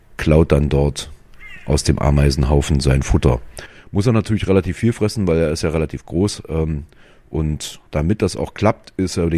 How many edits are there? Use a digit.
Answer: 1